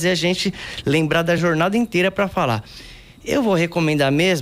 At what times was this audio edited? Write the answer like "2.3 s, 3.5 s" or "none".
none